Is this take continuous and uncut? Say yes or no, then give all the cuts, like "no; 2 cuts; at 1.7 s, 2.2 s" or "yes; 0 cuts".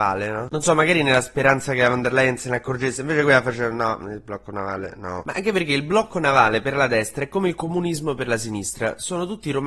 yes; 0 cuts